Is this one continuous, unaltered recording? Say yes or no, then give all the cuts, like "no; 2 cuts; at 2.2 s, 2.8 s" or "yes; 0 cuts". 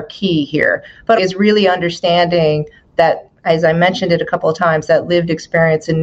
no; 1 cut; at 1.2 s